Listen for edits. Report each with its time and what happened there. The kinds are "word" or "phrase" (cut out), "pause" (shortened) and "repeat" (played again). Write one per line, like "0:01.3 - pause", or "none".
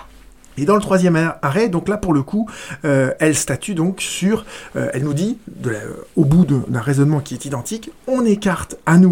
none